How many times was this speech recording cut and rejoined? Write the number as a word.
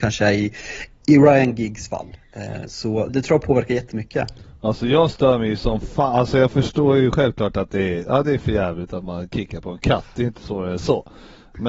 one